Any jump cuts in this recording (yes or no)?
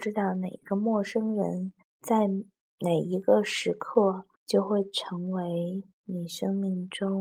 yes